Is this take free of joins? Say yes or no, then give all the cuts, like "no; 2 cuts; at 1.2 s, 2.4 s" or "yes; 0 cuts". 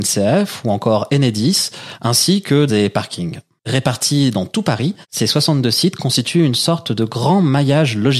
no; 2 cuts; at 2.7 s, 5.0 s